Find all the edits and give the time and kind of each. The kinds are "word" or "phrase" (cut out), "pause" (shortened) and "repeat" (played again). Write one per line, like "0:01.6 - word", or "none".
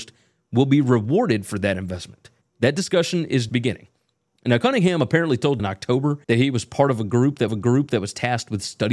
0:02.4 - pause
0:03.5 - word
0:05.6 - word
0:06.2 - pause
0:07.5 - repeat